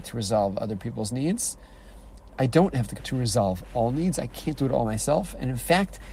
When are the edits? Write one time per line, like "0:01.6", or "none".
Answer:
0:03.0